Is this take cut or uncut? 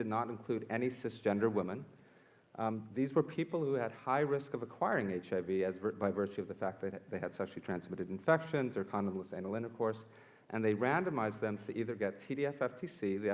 uncut